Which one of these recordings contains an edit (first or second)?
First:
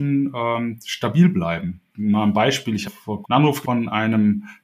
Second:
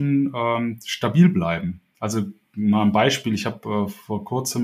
first